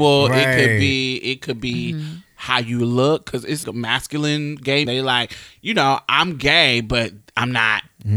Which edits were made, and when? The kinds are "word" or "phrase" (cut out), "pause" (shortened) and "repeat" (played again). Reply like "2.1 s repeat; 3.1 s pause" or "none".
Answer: 3.6 s word; 4.9 s word